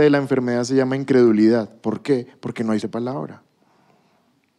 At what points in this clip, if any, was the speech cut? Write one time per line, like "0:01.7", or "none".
0:02.8